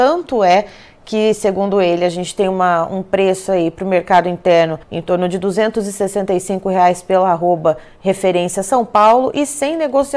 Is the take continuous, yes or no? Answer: no